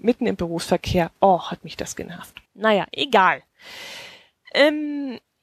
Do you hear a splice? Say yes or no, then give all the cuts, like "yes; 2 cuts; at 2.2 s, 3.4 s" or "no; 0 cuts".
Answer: yes; 2 cuts; at 1.2 s, 2.5 s